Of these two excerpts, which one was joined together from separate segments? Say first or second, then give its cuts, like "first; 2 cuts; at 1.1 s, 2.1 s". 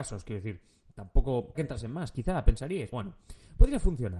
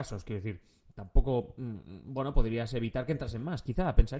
first; 2 cuts; at 1.5 s, 2.9 s